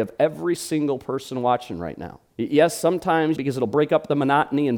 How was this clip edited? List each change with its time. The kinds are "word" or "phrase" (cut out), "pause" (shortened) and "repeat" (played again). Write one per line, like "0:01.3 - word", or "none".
0:02.3 - pause
0:03.4 - phrase